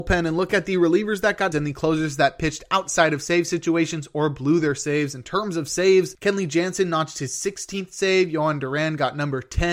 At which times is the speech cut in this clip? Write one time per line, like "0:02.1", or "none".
0:01.5